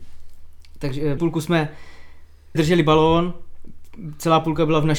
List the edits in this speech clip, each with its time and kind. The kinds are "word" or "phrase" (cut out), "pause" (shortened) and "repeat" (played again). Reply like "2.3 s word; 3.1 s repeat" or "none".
1.2 s word; 2.5 s word